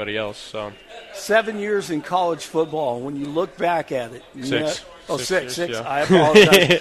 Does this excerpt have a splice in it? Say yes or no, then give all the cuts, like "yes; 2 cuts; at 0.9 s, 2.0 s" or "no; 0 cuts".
no; 0 cuts